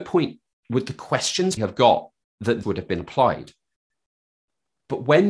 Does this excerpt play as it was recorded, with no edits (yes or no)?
no